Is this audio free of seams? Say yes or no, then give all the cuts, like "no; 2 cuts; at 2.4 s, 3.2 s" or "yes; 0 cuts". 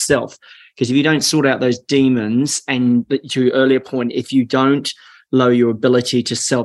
yes; 0 cuts